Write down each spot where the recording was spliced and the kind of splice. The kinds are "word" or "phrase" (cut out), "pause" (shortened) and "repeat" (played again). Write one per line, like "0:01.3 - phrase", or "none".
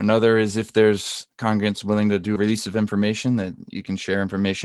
0:02.4 - word